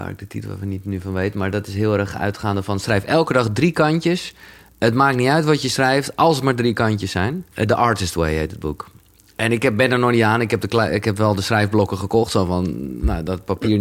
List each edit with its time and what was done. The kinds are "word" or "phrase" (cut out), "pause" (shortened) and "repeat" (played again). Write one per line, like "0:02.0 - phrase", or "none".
0:07.5 - pause